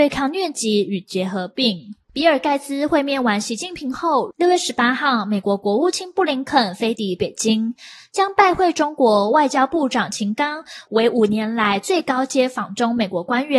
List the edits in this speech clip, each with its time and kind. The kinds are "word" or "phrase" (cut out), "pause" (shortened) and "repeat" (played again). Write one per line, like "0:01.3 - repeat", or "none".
0:02.0 - pause